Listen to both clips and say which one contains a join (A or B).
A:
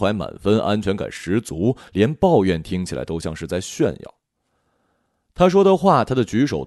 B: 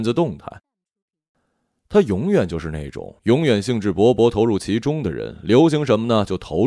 B